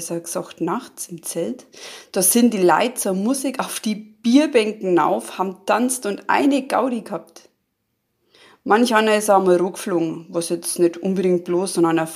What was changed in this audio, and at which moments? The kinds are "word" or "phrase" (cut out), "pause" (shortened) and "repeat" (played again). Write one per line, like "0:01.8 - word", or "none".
none